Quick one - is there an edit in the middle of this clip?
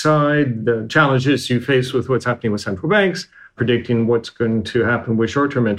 no; 0 cuts

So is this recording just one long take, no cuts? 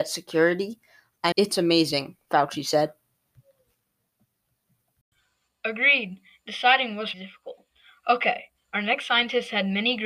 no; 2 cuts; at 1.3 s, 7.1 s

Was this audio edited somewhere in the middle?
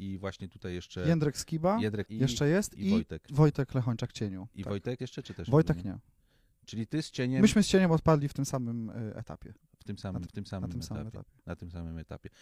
yes; 3 cuts; at 2.0 s, 5.0 s, 10.3 s

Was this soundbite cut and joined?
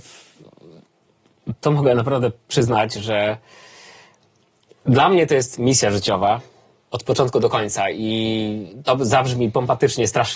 no; 0 cuts

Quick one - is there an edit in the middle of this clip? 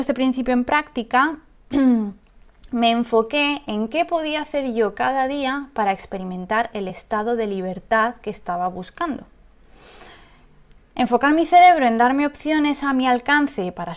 no; 0 cuts

